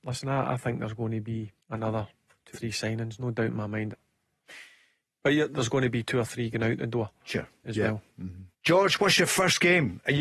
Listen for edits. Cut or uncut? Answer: cut